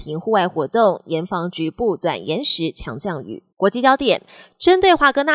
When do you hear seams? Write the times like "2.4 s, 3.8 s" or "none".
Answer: 3.5 s

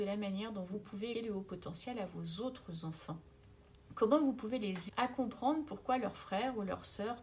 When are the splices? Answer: 1.1 s, 4.9 s

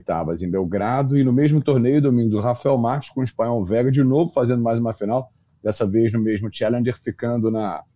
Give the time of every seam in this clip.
none

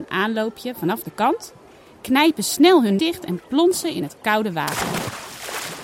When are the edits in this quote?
3.0 s

